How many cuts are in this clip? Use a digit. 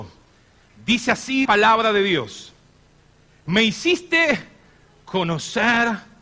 1